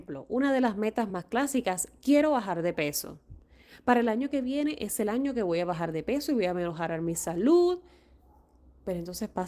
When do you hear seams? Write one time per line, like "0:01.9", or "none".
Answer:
none

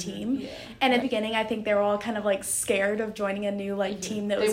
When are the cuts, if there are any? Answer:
0:01.0

